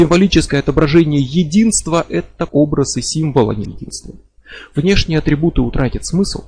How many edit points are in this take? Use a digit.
2